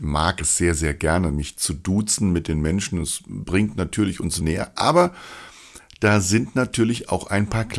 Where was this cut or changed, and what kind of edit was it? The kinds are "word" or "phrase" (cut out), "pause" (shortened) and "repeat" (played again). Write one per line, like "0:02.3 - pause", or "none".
0:04.4 - word